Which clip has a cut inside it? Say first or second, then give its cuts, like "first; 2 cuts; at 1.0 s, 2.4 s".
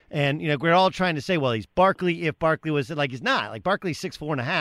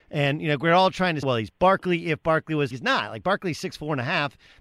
second; 2 cuts; at 1.2 s, 2.7 s